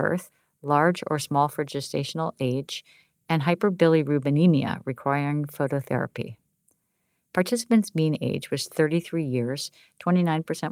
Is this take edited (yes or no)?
no